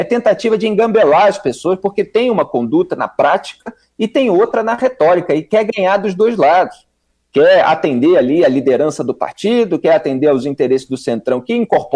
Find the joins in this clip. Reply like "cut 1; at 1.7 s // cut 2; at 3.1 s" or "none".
none